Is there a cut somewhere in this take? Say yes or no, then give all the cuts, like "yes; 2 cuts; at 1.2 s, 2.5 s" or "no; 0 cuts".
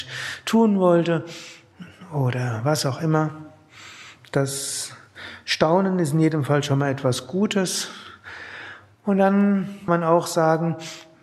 yes; 1 cut; at 9.9 s